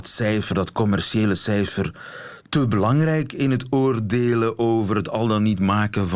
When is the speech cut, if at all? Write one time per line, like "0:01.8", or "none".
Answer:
none

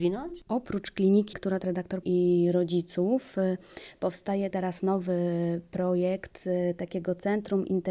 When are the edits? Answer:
0:01.3
0:01.6
0:02.0
0:04.5

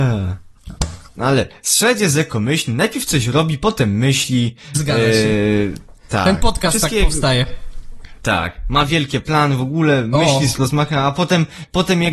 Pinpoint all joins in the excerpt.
0:01.1

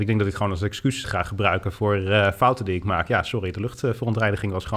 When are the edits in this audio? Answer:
0:01.0

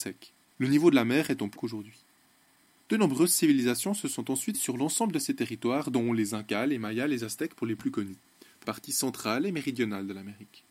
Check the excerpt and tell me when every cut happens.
0:01.6
0:04.5
0:08.6

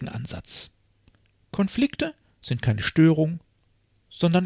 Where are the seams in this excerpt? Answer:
none

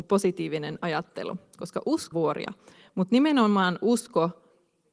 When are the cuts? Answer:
0:02.1

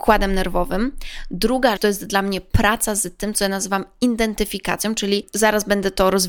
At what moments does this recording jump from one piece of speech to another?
0:01.8

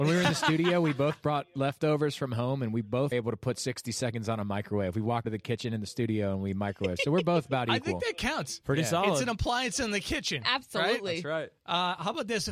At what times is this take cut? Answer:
0:03.1
0:05.2

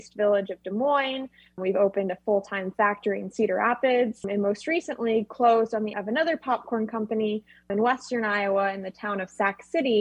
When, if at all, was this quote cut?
0:05.9

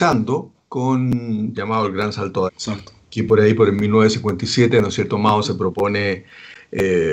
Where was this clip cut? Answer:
0:01.5
0:02.5

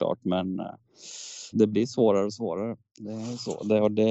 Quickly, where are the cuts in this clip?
0:01.5

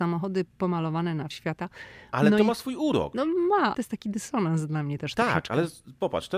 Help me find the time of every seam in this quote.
0:01.3
0:03.7

